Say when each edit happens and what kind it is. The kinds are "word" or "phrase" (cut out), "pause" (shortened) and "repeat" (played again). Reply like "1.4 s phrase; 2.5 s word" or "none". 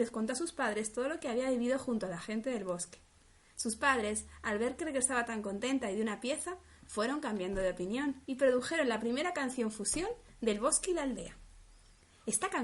8.2 s pause